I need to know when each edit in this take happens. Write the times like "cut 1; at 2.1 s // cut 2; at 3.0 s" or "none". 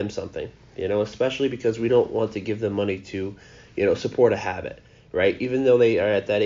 none